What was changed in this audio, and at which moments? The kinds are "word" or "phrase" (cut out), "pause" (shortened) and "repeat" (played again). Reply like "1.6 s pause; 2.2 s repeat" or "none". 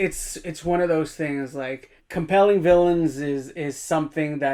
2.0 s pause

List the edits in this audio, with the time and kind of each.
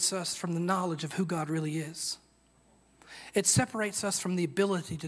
none

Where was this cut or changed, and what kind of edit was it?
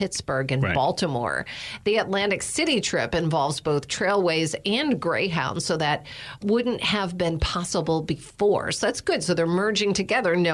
6.4 s word

